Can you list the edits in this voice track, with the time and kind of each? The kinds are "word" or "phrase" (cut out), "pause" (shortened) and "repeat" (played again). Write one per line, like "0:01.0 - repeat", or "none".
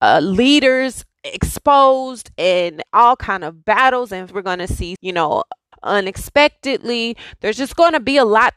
0:01.1 - pause
0:04.3 - word
0:05.0 - word
0:05.7 - phrase